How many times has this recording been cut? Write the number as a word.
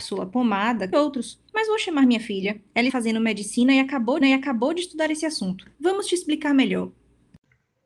five